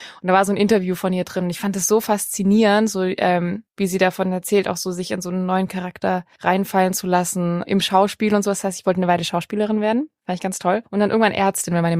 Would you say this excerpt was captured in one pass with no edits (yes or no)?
yes